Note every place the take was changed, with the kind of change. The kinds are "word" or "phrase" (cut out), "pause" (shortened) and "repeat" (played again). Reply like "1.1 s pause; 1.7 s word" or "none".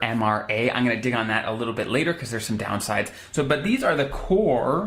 none